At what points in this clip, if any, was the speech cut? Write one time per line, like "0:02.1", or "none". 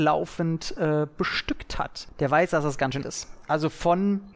0:03.0